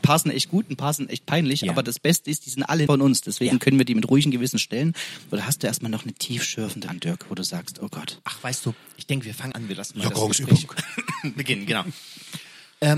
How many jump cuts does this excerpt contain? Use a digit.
3